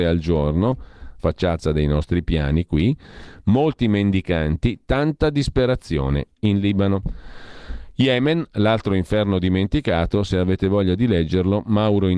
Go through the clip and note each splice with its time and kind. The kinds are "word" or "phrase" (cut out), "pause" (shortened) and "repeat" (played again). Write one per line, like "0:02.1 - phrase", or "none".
0:01.2 - word